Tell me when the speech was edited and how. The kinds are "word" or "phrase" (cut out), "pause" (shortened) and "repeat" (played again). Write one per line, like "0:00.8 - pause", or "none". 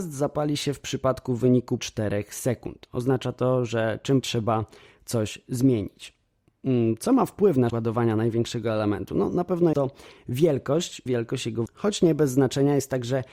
0:01.8 - word
0:04.2 - word
0:07.7 - word
0:09.7 - word
0:11.1 - word
0:11.7 - word